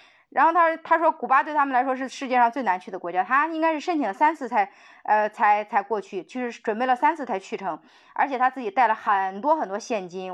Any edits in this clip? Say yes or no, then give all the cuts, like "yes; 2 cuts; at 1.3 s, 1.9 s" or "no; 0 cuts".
no; 0 cuts